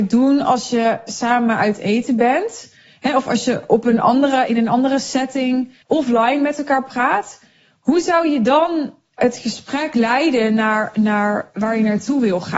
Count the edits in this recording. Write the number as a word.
one